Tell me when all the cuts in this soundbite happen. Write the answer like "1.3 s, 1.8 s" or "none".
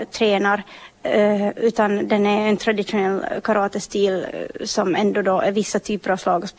none